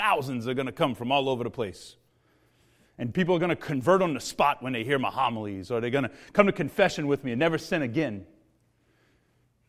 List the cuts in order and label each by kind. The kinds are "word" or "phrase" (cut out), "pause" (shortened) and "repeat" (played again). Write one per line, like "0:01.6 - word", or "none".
none